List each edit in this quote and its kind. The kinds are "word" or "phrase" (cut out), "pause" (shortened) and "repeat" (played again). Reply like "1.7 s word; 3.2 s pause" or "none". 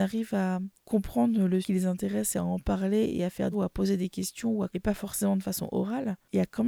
1.6 s word; 3.5 s word; 4.7 s word